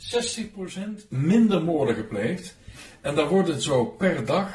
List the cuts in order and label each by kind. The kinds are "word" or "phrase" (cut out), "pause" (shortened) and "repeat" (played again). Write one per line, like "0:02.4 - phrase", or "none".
none